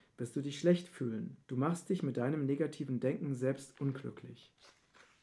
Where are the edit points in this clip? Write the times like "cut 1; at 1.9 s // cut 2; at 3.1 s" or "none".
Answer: cut 1; at 1.4 s